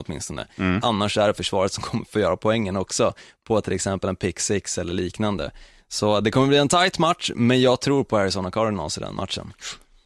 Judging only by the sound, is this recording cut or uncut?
uncut